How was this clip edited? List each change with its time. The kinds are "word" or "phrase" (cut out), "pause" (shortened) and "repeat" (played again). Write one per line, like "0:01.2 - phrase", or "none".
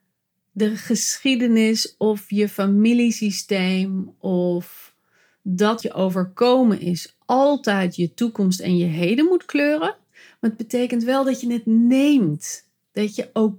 0:05.8 - word